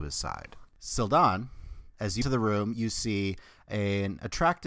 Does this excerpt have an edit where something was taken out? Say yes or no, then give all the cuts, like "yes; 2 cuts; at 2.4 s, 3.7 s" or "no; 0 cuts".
yes; 1 cut; at 2.2 s